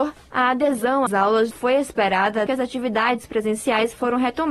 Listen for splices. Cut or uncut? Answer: cut